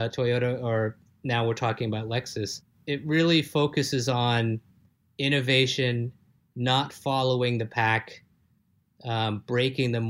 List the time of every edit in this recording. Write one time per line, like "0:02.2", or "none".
none